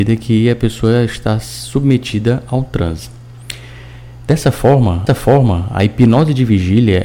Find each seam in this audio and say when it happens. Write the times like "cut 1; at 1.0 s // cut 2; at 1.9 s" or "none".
cut 1; at 5.1 s

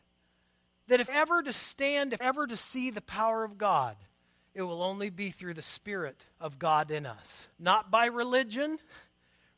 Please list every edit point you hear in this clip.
cut 1; at 1.1 s // cut 2; at 2.2 s // cut 3; at 6.3 s // cut 4; at 7.5 s

